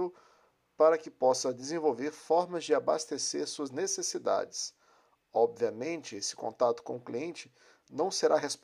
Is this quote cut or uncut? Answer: uncut